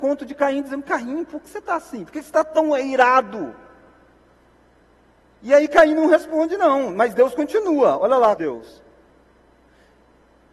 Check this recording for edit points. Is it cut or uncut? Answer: cut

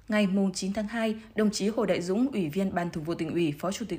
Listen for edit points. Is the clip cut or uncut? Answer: uncut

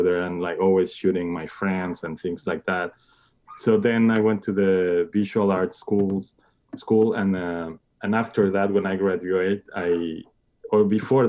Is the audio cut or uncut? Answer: uncut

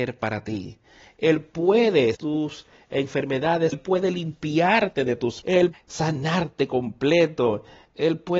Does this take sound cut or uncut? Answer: cut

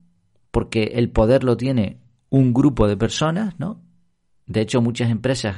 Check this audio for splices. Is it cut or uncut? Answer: uncut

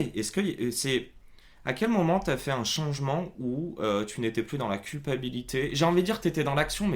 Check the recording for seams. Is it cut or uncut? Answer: uncut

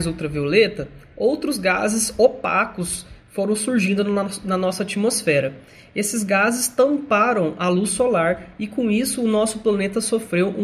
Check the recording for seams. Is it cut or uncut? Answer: uncut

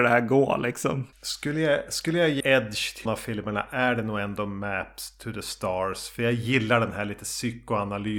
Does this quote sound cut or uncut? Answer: cut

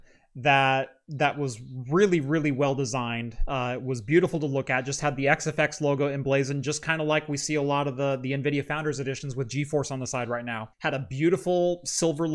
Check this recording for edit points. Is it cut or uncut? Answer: cut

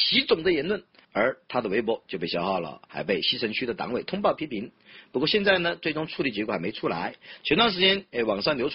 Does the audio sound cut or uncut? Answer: cut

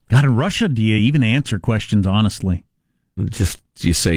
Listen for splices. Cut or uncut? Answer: uncut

